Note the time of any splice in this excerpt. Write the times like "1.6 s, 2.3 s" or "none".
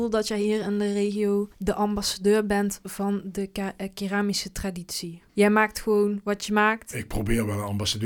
1.5 s, 5.3 s